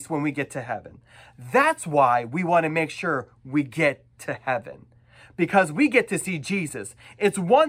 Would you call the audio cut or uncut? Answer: uncut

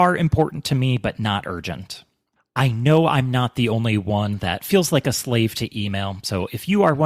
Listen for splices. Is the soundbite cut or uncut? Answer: uncut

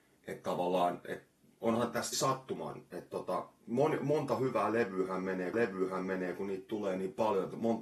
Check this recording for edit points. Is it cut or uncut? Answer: cut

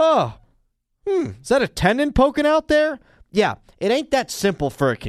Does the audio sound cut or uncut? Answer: uncut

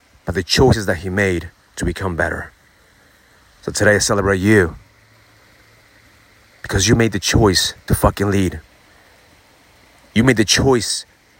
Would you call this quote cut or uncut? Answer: uncut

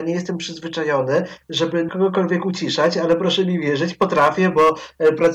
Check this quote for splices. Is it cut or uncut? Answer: cut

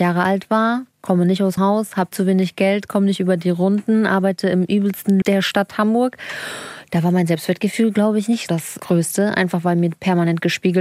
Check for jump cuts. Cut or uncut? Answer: cut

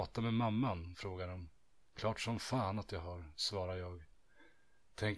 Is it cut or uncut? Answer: uncut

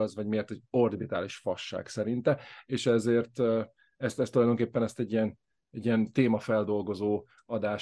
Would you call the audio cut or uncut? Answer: uncut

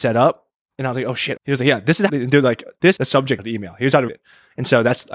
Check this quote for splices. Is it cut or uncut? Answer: cut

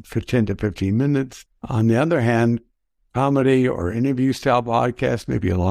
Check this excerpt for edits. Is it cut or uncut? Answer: uncut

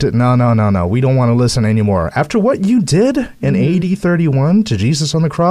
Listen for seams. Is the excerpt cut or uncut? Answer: uncut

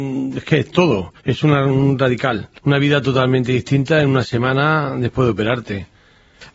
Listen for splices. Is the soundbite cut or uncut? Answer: cut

